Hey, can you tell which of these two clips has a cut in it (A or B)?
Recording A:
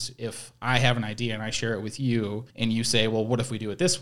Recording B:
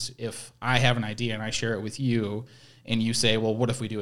A